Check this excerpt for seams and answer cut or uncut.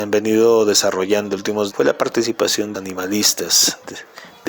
cut